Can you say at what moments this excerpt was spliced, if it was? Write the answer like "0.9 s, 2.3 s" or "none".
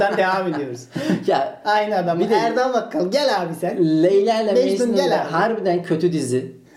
none